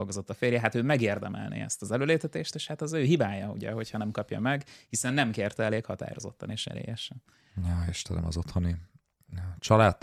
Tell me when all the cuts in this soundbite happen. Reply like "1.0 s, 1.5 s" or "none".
none